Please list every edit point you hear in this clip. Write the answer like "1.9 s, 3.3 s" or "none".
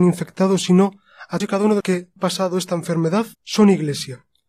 1.4 s, 1.8 s, 2.2 s, 3.3 s

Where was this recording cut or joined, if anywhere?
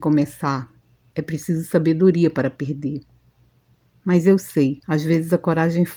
4.8 s

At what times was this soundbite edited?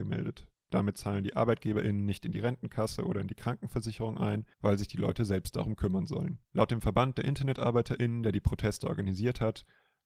4.5 s, 6.4 s

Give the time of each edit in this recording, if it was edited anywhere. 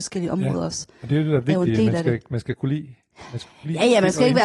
none

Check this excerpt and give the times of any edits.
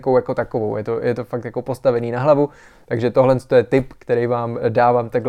none

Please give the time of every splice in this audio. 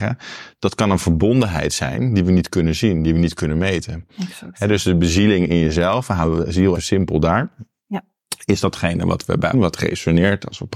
6.7 s, 9.5 s

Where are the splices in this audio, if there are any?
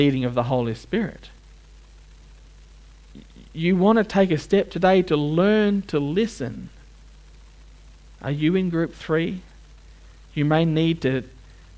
none

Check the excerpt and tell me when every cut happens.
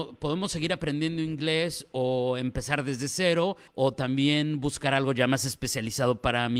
3.7 s

